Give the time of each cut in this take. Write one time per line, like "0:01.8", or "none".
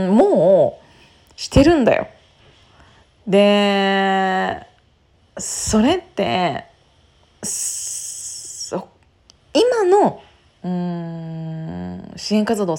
none